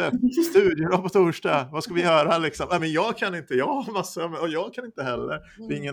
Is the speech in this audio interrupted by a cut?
no; 0 cuts

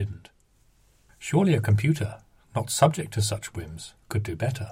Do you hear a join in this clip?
no; 0 cuts

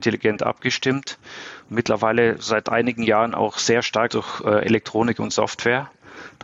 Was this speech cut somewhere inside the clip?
yes; 1 cut; at 4.1 s

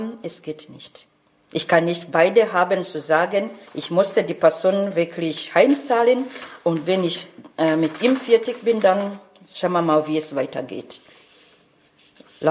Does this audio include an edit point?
yes; 2 cuts; at 1.3 s, 3.7 s

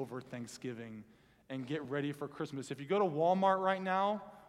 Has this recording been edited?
no; 0 cuts

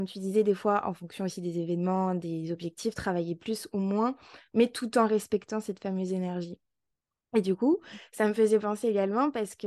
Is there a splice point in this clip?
no; 0 cuts

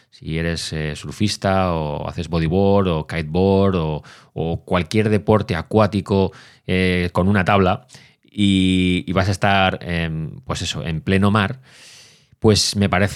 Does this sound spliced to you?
no; 0 cuts

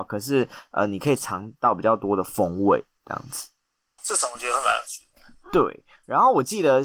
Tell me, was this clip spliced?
yes; 1 cut; at 4.0 s

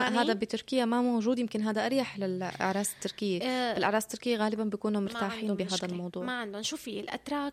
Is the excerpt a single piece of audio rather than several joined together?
yes; 0 cuts

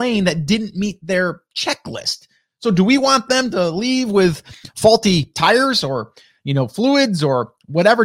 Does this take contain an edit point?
no; 0 cuts

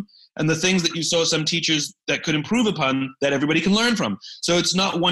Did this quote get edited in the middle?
no; 0 cuts

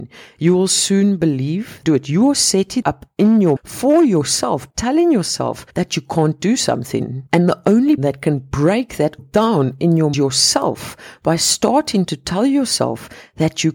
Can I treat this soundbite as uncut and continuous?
no; 9 cuts; at 1.8 s, 2.8 s, 3.6 s, 4.7 s, 5.7 s, 7.3 s, 8.0 s, 9.2 s, 10.1 s

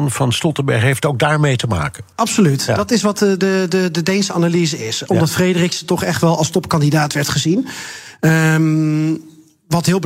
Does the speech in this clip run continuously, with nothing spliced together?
no; 1 cut; at 2.1 s

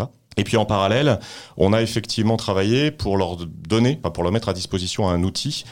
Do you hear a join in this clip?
no; 0 cuts

